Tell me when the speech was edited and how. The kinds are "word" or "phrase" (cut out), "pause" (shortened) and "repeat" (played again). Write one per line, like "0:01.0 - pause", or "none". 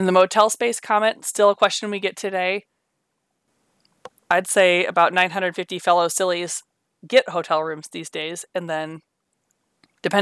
none